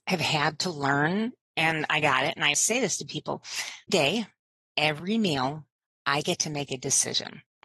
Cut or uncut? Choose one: cut